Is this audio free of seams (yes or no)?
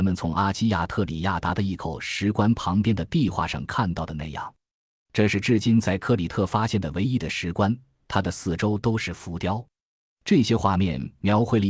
yes